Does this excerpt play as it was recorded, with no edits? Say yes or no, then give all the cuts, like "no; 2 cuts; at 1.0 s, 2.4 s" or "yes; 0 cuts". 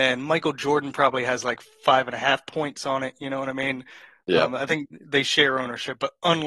yes; 0 cuts